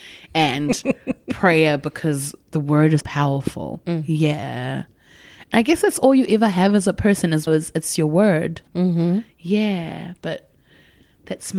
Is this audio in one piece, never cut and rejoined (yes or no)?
no